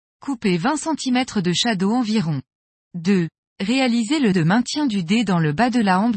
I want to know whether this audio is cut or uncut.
cut